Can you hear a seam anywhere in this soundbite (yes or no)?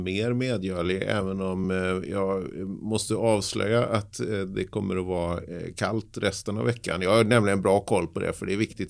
no